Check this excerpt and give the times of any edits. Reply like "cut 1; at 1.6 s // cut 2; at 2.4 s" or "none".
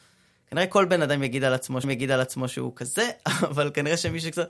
cut 1; at 1.8 s